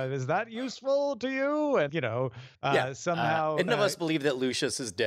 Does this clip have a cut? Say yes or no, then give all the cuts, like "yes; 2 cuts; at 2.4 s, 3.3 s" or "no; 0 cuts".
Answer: yes; 3 cuts; at 1.9 s, 2.5 s, 3.7 s